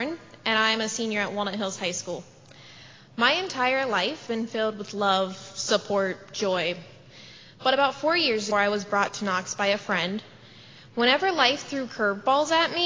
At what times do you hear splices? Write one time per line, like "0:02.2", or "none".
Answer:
0:04.3
0:08.5